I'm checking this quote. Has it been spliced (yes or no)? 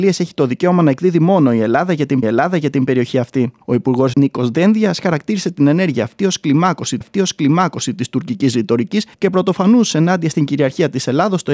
yes